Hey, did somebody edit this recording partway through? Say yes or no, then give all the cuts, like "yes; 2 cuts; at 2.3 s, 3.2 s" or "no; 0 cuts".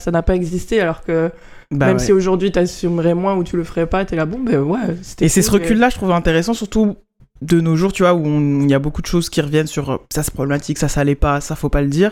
no; 0 cuts